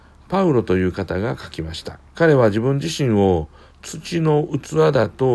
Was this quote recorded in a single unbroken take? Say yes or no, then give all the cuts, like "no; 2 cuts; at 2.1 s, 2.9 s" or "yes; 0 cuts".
no; 1 cut; at 2.1 s